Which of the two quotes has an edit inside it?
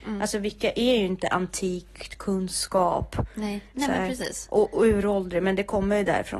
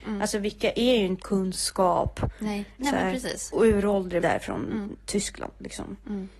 second; 3 cuts; at 1.2 s, 3.5 s, 4.2 s

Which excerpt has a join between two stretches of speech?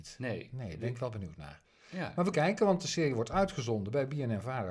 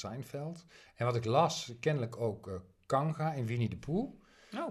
first; 1 cut; at 2.3 s

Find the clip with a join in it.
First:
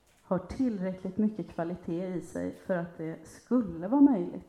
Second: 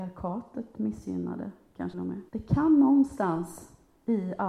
second; 2 cuts; at 1.9 s, 2.3 s

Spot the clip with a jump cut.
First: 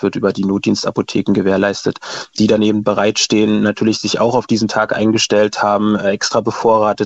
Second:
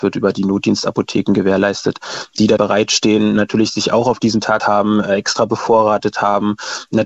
second; 2 cuts; at 2.6 s, 4.6 s

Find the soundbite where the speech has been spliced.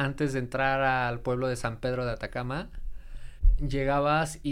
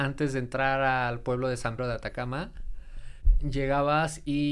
second; 1 cut; at 1.8 s

